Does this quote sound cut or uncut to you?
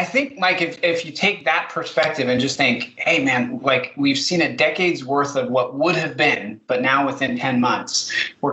uncut